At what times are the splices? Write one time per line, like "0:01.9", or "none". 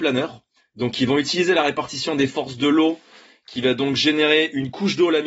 none